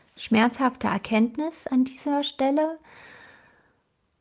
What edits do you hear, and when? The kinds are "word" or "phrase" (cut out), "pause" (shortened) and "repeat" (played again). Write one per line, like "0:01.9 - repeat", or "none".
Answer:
none